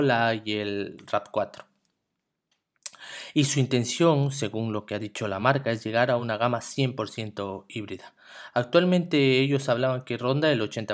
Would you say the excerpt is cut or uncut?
uncut